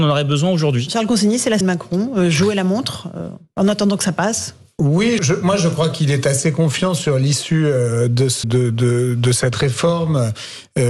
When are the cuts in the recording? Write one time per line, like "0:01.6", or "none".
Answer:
0:01.6
0:05.2
0:08.4